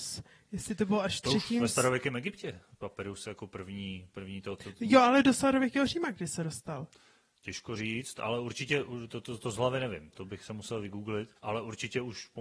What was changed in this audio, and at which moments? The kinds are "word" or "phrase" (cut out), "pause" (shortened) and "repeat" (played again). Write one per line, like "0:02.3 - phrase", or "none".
0:10.1 - word
0:11.4 - pause